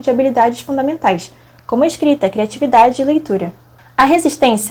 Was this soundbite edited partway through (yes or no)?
no